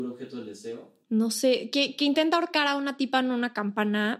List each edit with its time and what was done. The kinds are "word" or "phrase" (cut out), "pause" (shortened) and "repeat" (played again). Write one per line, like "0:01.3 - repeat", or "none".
0:01.0 - pause